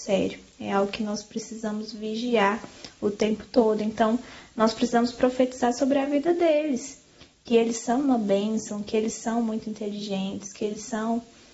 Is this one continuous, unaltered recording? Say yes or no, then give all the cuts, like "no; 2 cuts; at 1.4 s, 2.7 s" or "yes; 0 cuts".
yes; 0 cuts